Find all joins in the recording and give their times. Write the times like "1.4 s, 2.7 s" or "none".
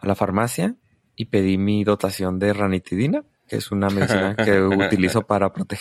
none